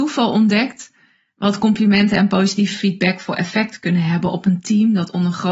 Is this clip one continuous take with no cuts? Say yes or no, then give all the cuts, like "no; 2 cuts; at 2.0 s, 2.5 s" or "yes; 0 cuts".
yes; 0 cuts